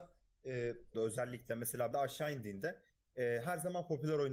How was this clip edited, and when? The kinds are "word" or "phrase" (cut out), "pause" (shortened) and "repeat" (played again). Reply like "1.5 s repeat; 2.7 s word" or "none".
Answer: 0.9 s phrase; 1.9 s word